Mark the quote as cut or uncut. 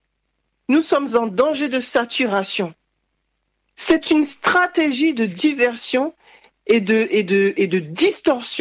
uncut